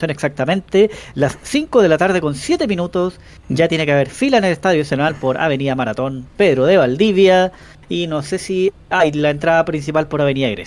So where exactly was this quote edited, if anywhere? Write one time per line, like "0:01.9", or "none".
none